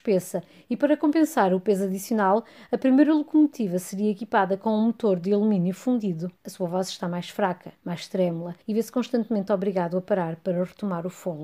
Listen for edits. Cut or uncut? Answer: cut